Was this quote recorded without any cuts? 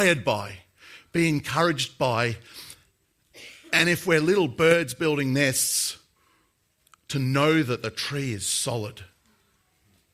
yes; 0 cuts

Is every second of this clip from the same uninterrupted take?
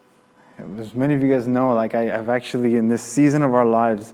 yes; 0 cuts

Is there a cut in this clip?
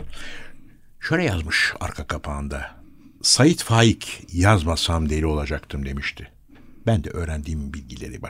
no; 0 cuts

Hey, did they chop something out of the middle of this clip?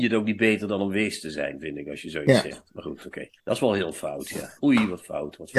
yes; 2 cuts; at 3.4 s, 4.6 s

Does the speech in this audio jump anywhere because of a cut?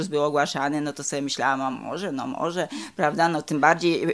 no; 0 cuts

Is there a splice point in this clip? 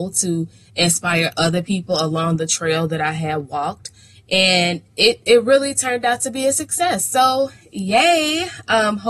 no; 0 cuts

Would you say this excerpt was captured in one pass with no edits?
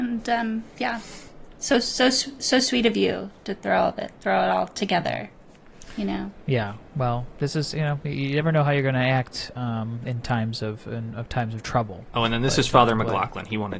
yes; 0 cuts

